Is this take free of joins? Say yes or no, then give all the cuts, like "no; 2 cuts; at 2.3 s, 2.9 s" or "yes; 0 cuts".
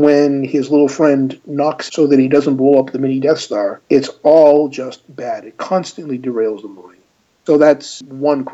no; 1 cut; at 1.9 s